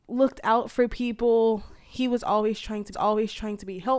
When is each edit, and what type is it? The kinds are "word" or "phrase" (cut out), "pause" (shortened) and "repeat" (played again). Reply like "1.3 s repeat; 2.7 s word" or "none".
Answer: 2.9 s repeat

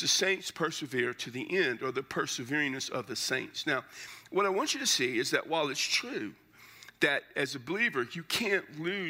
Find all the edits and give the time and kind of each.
none

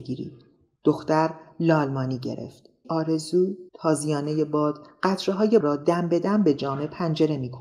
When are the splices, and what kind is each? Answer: 2.8 s word; 3.7 s pause; 5.6 s word

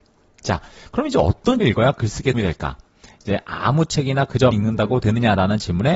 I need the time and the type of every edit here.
1.6 s word; 2.3 s word; 4.5 s word

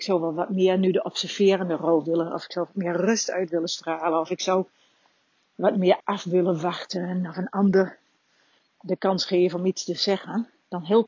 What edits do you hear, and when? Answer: none

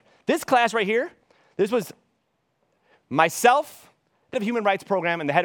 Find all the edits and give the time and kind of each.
4.3 s word

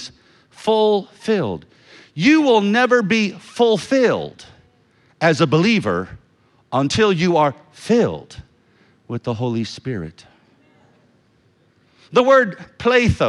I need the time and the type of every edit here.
none

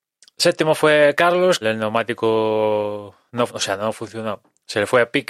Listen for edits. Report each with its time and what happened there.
1.6 s phrase; 3.5 s word

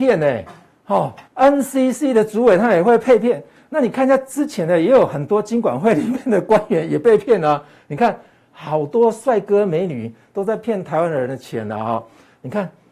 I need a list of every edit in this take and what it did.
1.3 s pause

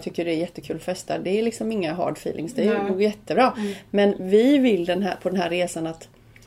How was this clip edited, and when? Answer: none

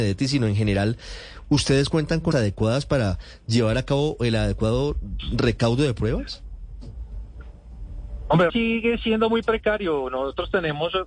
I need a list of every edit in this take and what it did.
2.3 s word; 8.5 s word

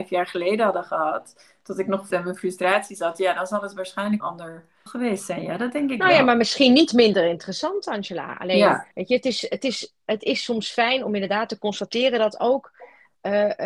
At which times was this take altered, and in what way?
2.1 s phrase; 4.2 s phrase; 4.9 s word; 8.9 s pause

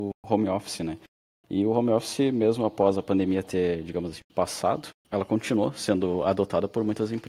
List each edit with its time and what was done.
4.9 s word

